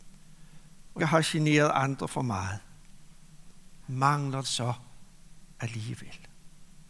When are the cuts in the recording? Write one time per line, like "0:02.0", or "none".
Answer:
0:01.0
0:03.8
0:04.4